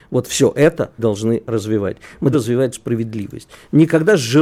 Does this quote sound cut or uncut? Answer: cut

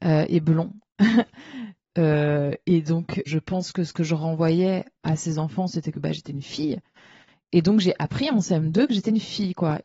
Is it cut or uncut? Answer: cut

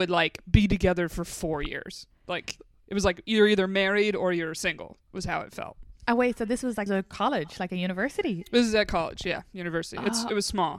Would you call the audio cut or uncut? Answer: cut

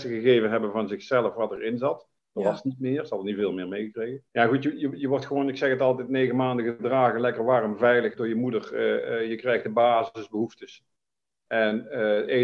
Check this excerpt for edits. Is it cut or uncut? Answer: cut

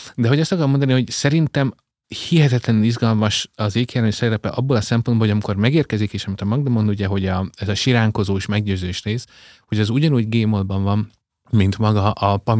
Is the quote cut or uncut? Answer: uncut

